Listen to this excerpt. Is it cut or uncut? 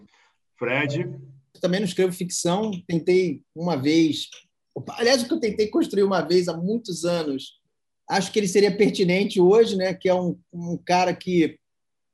cut